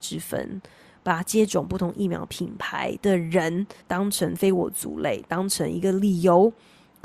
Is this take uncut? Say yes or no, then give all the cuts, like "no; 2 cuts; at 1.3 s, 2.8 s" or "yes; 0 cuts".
no; 1 cut; at 3.8 s